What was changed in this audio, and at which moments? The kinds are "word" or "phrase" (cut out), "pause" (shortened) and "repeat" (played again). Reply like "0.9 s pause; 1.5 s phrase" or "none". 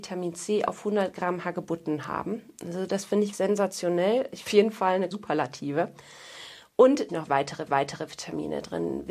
3.3 s word; 4.5 s phrase; 5.1 s word; 7.1 s phrase; 7.7 s repeat